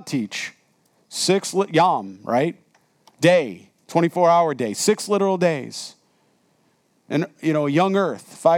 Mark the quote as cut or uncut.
uncut